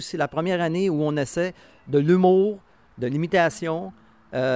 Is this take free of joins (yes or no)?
yes